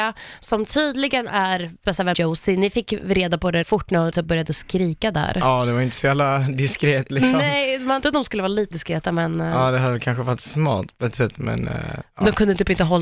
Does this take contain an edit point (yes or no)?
yes